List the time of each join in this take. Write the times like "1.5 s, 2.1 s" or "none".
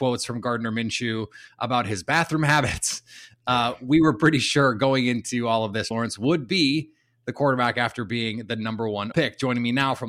5.9 s, 9.1 s